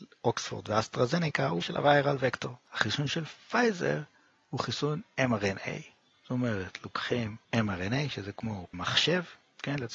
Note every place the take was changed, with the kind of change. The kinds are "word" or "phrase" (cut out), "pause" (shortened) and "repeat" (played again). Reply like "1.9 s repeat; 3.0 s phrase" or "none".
1.6 s word; 7.4 s pause; 8.7 s word